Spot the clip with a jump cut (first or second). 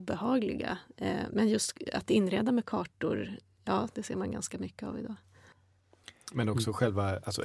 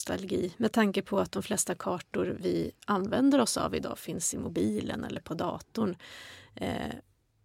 first